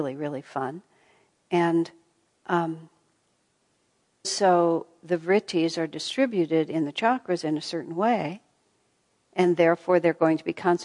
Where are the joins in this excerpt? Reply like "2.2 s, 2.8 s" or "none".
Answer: 4.2 s